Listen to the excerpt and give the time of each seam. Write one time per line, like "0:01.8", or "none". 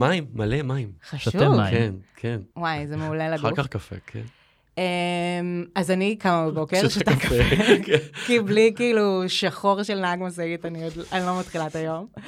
0:01.0
0:02.5